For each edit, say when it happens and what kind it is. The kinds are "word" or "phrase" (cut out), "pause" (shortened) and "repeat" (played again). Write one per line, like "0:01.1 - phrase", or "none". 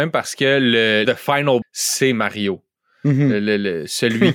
0:01.0 - word
0:01.6 - word